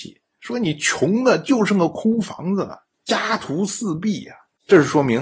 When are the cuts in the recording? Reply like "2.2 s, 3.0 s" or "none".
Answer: 2.9 s